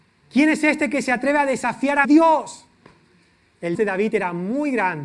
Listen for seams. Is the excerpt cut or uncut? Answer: cut